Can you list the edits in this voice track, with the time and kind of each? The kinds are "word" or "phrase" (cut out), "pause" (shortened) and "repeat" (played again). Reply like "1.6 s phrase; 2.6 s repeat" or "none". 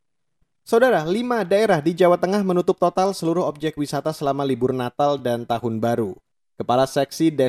none